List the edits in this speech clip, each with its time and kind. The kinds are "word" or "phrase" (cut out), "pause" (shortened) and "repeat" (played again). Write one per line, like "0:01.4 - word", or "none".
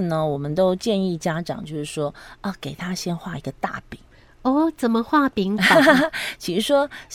none